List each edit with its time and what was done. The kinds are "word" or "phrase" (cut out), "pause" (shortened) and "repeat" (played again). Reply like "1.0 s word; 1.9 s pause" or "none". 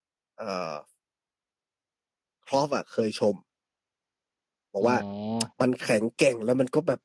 5.5 s pause